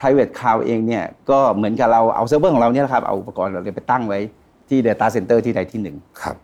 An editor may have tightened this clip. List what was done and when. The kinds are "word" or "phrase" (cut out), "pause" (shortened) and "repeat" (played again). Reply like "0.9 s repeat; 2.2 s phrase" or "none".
none

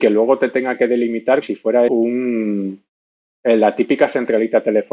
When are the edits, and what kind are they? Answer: 1.4 s word; 1.9 s word

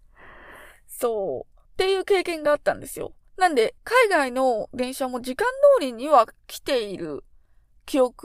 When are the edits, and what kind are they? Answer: 1.7 s pause; 3.8 s pause

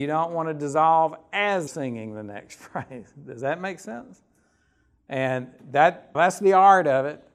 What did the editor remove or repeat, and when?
1.7 s word; 6.1 s word

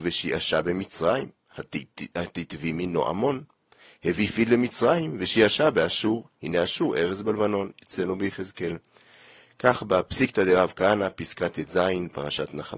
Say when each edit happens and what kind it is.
none

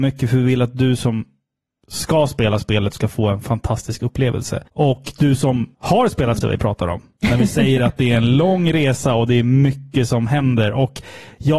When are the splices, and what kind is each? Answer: 4.7 s pause; 5.7 s pause; 6.4 s phrase

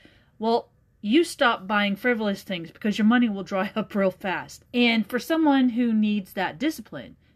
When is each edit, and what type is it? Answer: 4.7 s pause

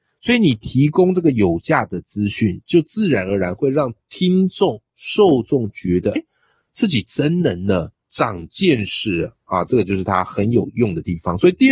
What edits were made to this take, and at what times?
6.2 s word

